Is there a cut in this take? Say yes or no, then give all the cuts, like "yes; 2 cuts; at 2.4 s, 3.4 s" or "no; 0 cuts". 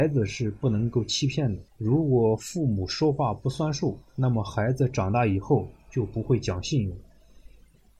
yes; 2 cuts; at 1.7 s, 4.1 s